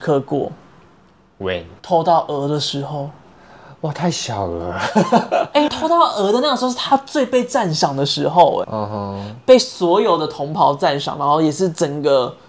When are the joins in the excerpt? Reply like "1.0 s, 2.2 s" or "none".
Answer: 1.8 s, 5.7 s, 8.6 s